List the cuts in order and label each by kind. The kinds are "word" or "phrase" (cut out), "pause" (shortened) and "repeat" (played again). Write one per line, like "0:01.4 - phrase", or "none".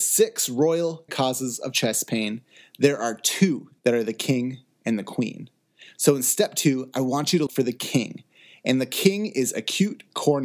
0:01.1 - word
0:03.8 - pause
0:07.5 - word